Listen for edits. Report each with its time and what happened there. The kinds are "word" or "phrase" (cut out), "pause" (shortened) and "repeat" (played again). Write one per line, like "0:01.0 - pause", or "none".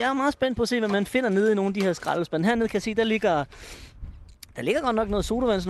none